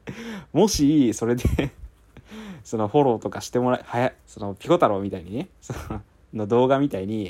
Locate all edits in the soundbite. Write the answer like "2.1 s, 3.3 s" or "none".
4.2 s